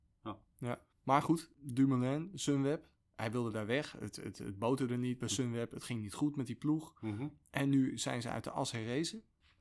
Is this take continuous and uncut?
no; 1 cut; at 0.9 s

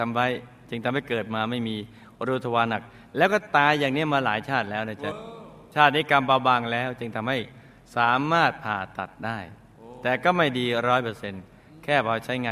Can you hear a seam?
no; 0 cuts

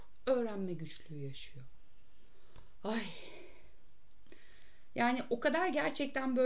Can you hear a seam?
no; 0 cuts

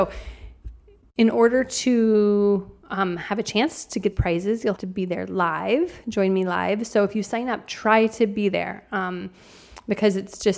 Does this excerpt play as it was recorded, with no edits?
no; 2 cuts; at 4.1 s, 4.8 s

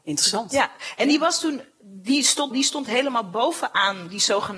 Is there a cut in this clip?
yes; 1 cut; at 2.5 s

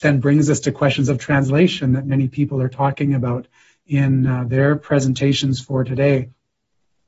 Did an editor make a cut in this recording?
no; 0 cuts

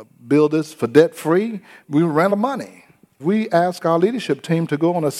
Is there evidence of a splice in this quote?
yes; 3 cuts; at 1.8 s, 2.3 s, 3.2 s

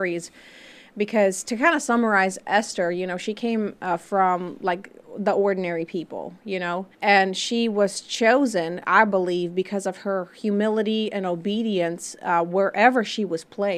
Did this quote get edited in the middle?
yes; 1 cut; at 6.9 s

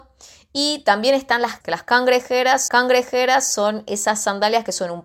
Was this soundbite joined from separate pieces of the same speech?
yes; 2 cuts; at 1.6 s, 2.7 s

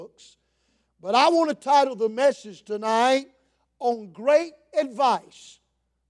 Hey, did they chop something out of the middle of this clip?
no; 0 cuts

